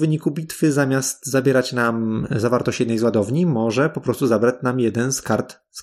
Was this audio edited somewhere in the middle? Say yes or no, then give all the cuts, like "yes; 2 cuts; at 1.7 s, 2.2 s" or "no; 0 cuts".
no; 0 cuts